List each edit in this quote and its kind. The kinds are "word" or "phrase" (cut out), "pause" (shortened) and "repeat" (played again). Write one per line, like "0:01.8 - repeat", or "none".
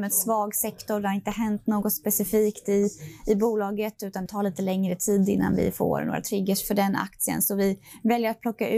0:04.3 - phrase